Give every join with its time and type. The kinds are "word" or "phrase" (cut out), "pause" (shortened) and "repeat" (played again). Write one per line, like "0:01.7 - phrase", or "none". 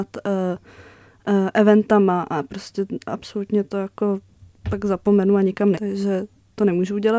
0:05.7 - word

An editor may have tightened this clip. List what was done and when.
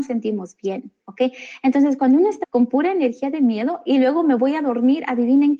0:01.0 - pause
0:02.4 - word

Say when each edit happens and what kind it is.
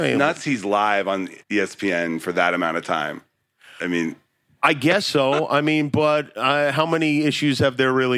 0:01.4 - pause

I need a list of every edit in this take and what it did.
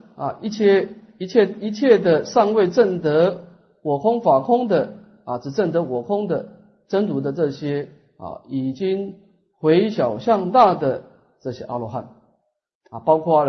none

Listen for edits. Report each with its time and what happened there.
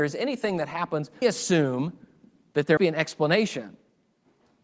0:01.2 - word
0:02.8 - word

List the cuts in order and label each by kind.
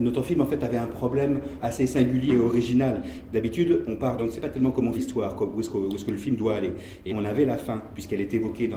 0:01.6 - word
0:02.3 - word
0:04.2 - phrase
0:04.9 - word
0:07.1 - word

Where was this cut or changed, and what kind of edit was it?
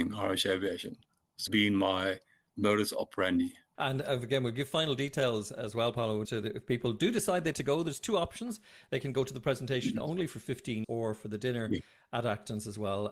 0:01.5 - word
0:06.2 - word
0:07.5 - word
0:10.8 - word

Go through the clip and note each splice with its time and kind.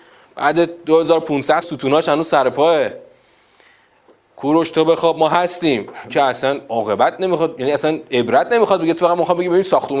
0:01.6 - word
0:06.1 - word

